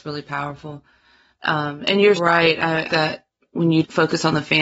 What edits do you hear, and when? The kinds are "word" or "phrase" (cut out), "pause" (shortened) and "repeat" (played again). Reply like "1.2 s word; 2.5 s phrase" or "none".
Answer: 2.2 s word; 2.9 s word